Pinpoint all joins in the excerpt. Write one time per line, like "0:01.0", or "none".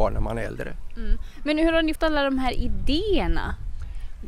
0:01.9